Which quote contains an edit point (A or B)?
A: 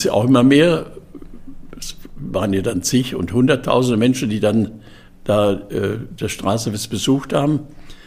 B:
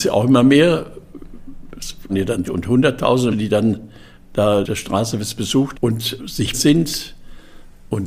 B